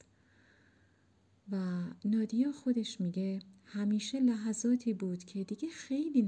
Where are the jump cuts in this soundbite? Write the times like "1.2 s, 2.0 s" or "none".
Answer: none